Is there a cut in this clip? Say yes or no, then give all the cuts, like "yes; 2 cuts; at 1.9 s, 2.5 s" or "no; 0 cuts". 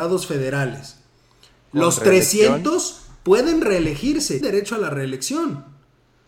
yes; 1 cut; at 4.4 s